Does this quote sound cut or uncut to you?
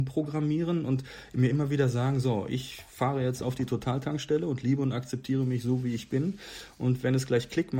uncut